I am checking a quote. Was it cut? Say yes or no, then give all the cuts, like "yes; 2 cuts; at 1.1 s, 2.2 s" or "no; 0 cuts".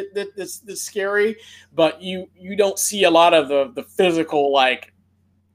no; 0 cuts